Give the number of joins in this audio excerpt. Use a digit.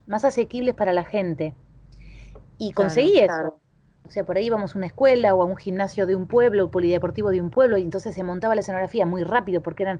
0